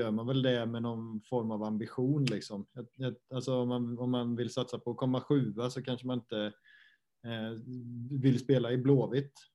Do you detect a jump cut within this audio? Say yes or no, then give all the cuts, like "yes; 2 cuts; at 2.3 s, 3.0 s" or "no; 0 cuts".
no; 0 cuts